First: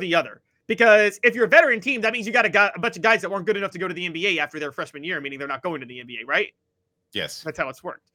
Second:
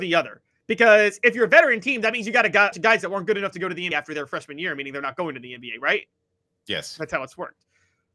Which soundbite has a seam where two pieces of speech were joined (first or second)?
second